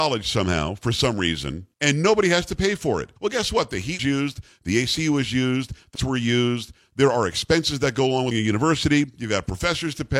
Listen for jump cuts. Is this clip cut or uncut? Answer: cut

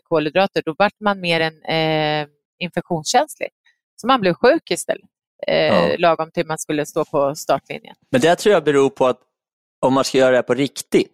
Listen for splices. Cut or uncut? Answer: uncut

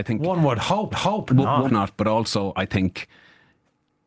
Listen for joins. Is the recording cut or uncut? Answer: cut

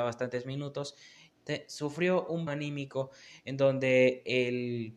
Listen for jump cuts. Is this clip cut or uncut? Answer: cut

